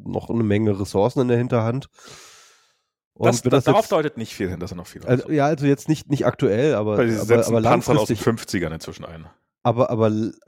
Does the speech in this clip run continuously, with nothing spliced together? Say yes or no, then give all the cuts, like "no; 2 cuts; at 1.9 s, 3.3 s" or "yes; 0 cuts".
no; 1 cut; at 5.3 s